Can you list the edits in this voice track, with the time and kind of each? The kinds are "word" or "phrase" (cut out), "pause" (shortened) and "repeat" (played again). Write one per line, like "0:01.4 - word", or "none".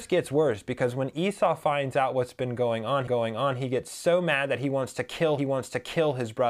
0:03.1 - repeat
0:05.4 - repeat